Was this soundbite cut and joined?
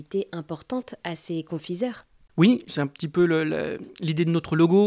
no; 0 cuts

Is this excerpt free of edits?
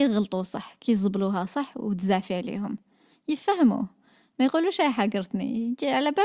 yes; 0 cuts

